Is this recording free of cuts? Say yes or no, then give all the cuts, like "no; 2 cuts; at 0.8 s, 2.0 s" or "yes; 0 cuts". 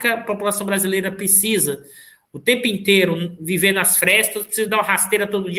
yes; 0 cuts